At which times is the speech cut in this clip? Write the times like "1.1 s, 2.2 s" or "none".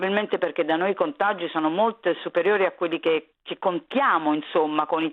3.3 s

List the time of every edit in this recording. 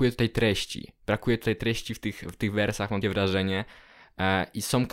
3.0 s

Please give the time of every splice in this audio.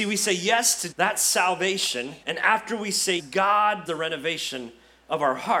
0.9 s, 2.2 s, 3.2 s, 3.9 s

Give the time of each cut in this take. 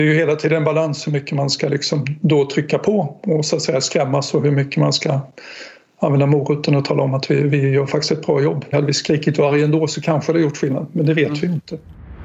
none

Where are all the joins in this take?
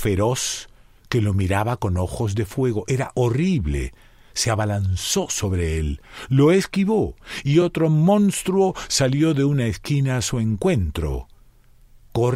none

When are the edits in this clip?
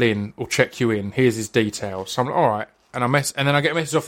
none

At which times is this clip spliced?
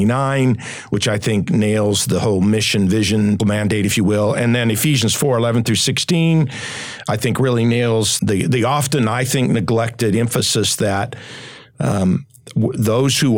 3.4 s, 8.2 s

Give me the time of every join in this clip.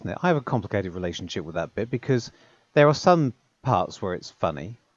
none

